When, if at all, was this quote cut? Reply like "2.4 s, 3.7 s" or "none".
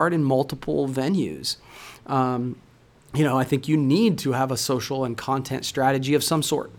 none